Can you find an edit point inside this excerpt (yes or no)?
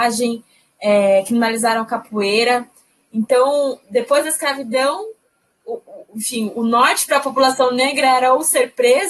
no